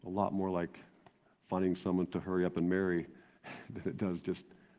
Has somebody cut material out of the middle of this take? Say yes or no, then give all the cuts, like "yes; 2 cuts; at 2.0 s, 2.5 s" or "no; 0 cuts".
no; 0 cuts